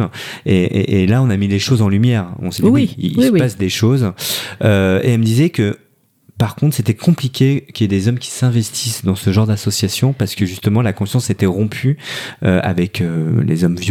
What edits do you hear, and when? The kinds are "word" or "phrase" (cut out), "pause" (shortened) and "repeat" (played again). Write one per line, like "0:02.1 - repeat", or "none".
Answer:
none